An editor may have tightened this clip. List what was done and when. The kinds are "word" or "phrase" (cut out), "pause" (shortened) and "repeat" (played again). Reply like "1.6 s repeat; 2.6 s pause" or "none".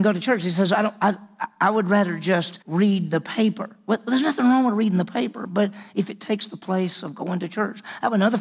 2.6 s pause